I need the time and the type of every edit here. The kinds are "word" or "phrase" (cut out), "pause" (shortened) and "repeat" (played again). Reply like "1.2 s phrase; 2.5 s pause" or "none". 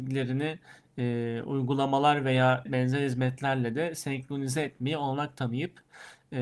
2.7 s word